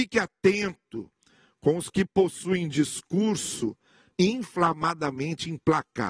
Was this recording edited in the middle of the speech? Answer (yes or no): no